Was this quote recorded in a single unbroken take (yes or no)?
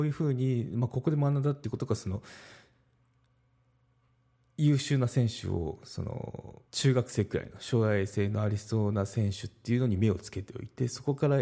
no